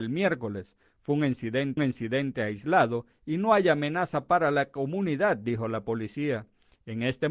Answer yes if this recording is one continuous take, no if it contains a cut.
no